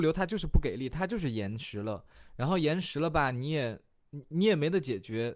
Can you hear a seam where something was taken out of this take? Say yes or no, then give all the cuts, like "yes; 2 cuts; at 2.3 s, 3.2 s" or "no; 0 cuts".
no; 0 cuts